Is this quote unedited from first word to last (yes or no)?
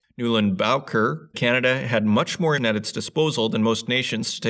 no